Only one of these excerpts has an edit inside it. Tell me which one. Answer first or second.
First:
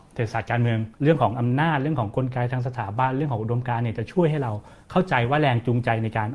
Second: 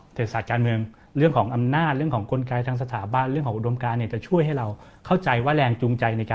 first